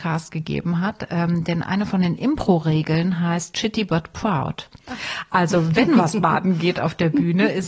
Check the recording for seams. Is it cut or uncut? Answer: uncut